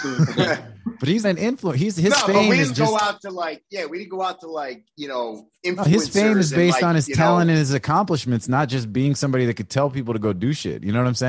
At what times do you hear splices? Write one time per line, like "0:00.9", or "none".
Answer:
0:01.2
0:02.7